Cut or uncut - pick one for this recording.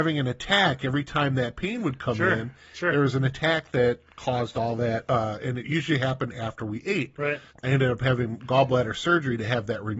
uncut